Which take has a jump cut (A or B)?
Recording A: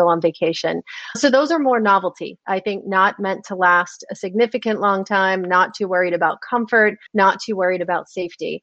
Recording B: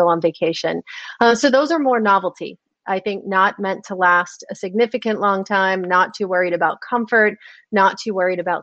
A